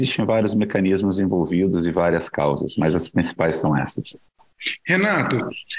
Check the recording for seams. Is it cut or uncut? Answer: uncut